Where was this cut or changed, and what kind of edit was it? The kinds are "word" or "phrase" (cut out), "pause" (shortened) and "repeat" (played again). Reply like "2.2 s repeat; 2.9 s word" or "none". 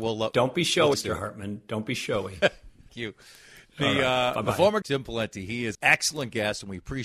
0.9 s word; 2.9 s word; 4.8 s word; 5.7 s word